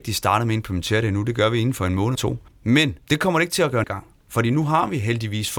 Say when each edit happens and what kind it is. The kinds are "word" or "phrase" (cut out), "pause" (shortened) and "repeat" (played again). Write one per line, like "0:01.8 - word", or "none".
0:02.2 - word
0:03.0 - pause
0:03.8 - word